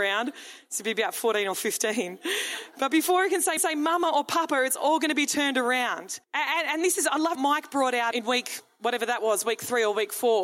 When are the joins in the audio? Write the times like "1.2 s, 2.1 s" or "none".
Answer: 3.6 s, 6.2 s, 7.4 s, 8.1 s